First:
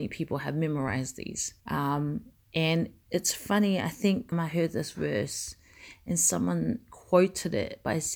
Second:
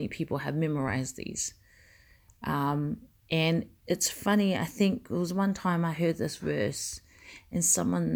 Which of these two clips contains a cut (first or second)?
first